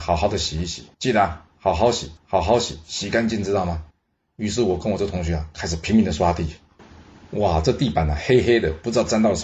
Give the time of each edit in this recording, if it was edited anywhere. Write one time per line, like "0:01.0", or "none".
0:00.9
0:02.2
0:03.9